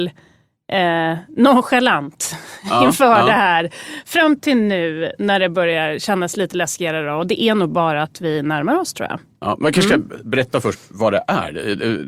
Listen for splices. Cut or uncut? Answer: uncut